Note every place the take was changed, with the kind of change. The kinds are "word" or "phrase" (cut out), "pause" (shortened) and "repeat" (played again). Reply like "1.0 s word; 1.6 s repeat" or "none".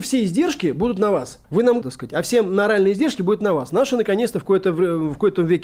1.4 s pause; 1.8 s phrase